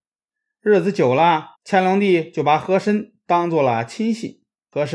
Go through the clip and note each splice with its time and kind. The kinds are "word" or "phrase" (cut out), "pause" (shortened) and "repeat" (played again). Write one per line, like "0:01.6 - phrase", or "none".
0:01.5 - pause